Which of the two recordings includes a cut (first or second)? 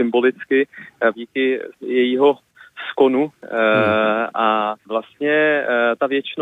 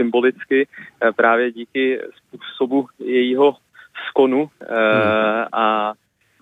first